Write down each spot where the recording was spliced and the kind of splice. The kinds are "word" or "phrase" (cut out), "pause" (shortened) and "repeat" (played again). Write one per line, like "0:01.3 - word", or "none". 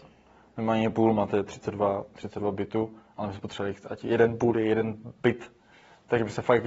none